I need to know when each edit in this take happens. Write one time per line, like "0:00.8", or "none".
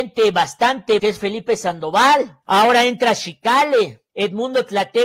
0:01.0
0:02.4
0:04.1